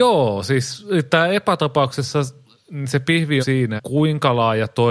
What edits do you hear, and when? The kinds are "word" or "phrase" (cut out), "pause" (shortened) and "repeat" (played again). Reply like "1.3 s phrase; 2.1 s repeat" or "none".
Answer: 3.4 s word; 3.8 s word